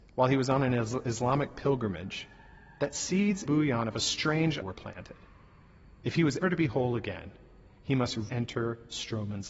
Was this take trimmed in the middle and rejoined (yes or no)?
yes